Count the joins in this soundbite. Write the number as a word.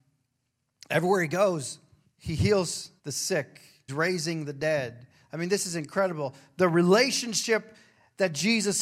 three